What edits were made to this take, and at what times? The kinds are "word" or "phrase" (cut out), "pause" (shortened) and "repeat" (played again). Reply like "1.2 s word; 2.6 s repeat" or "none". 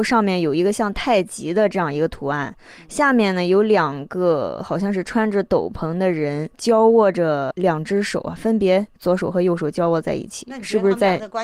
6.5 s pause